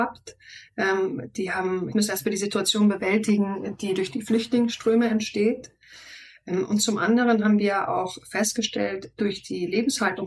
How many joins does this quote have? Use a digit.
1